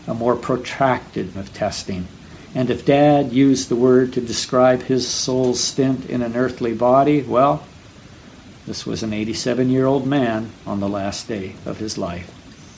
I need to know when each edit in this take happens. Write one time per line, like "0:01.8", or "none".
0:01.3